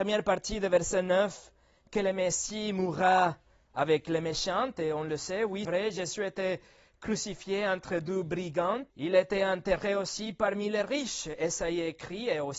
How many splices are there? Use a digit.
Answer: 2